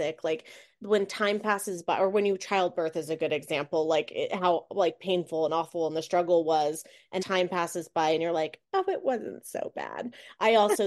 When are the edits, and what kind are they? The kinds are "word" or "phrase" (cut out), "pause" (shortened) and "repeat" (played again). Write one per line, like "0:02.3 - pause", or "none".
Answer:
0:07.2 - phrase